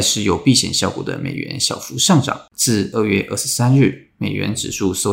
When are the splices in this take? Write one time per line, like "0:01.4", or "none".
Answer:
0:02.5